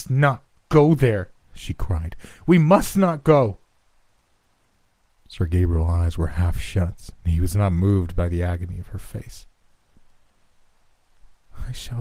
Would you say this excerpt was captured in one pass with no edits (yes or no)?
yes